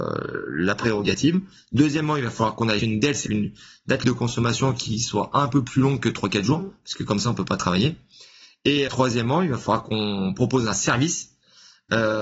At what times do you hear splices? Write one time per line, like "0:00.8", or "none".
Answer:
0:02.8
0:03.3
0:04.0
0:08.9

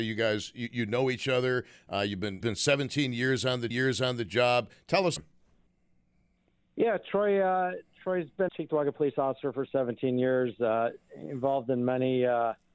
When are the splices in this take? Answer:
0:02.4
0:03.7
0:05.2
0:08.5

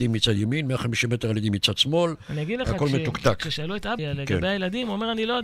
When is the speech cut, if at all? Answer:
0:04.0

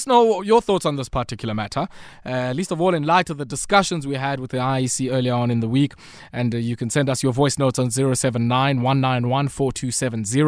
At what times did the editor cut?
none

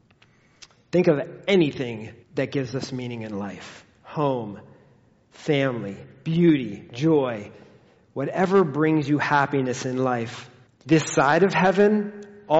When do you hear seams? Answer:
0:02.2
0:10.7

